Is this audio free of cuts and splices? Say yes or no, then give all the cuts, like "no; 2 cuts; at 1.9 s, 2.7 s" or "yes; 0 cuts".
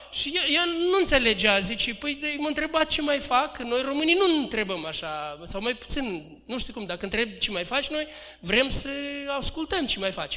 yes; 0 cuts